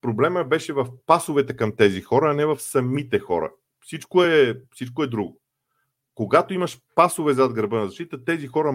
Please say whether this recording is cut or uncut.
uncut